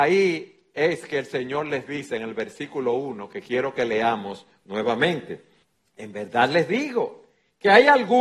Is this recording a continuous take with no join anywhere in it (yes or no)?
no